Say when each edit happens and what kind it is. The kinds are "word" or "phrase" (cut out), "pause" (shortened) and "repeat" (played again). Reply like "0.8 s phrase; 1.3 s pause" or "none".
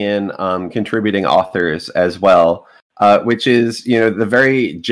none